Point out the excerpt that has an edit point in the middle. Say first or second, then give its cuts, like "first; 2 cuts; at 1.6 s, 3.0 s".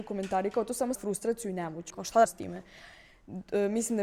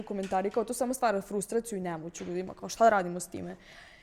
first; 3 cuts; at 0.9 s, 1.9 s, 2.3 s